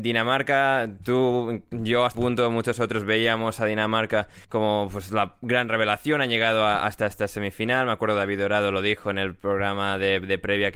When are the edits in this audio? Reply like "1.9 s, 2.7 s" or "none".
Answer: 2.1 s, 4.4 s